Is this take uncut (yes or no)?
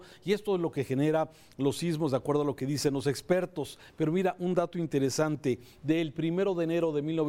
yes